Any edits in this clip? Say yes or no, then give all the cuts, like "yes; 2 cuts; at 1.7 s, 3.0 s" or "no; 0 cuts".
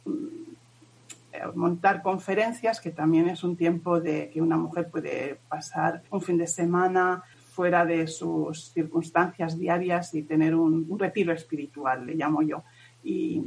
yes; 2 cuts; at 6.1 s, 7.3 s